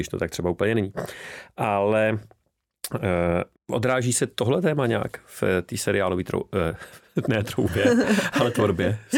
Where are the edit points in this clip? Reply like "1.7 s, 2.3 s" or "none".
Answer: 3.6 s

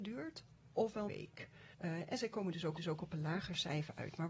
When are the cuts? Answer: 1.1 s, 1.7 s, 2.8 s

